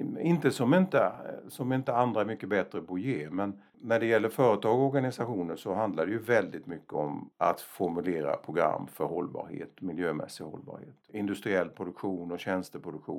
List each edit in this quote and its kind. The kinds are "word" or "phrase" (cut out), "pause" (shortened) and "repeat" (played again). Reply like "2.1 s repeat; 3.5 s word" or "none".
none